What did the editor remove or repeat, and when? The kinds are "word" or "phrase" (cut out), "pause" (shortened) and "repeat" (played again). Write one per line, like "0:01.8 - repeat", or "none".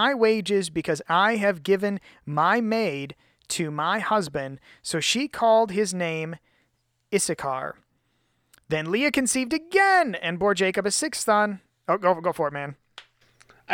none